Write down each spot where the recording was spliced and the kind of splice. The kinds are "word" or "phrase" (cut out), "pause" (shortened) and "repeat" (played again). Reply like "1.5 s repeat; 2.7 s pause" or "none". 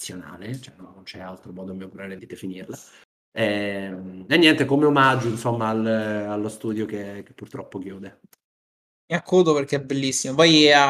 2.2 s word